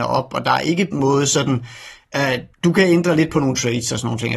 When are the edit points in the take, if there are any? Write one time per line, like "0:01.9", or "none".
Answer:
0:00.9
0:02.5